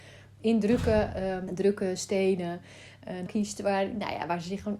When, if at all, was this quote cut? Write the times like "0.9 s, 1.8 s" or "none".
1.5 s, 3.3 s